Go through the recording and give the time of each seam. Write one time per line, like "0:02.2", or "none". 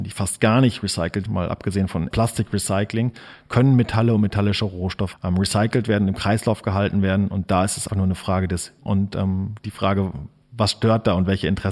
0:01.3
0:02.1
0:05.1
0:07.9
0:08.8